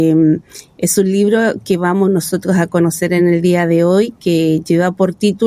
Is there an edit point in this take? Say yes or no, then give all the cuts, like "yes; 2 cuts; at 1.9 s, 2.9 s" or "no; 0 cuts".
no; 0 cuts